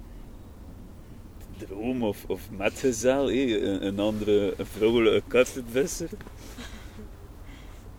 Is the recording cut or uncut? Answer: uncut